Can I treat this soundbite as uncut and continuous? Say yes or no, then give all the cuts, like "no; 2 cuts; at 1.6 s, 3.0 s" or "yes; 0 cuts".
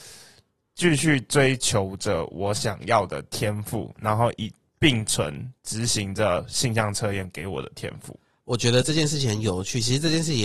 no; 2 cuts; at 5.6 s, 8.2 s